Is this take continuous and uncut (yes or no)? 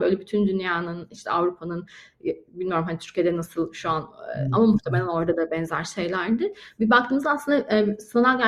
yes